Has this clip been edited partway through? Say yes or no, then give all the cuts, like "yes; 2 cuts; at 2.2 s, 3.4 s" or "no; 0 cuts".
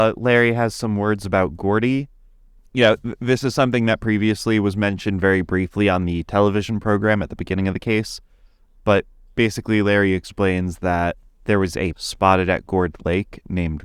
yes; 1 cut; at 11.9 s